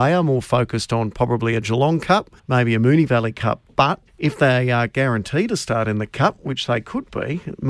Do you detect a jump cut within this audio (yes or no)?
yes